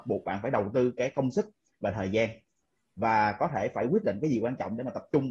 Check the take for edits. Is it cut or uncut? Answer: uncut